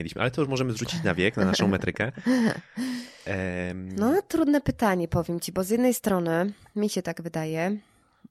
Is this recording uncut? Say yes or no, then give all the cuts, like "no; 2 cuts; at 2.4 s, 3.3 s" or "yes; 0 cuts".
yes; 0 cuts